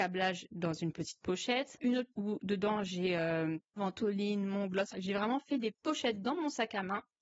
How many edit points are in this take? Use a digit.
5